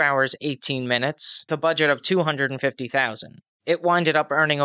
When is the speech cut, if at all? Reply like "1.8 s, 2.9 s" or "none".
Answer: 1.5 s